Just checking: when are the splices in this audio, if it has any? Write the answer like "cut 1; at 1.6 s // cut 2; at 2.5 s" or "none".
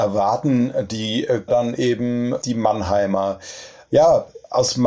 cut 1; at 1.5 s